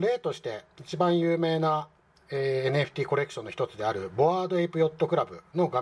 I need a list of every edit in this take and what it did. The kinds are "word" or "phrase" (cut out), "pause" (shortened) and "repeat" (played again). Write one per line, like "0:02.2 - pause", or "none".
none